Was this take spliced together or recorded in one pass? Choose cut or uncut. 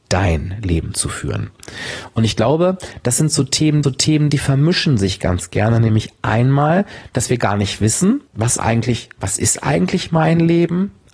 cut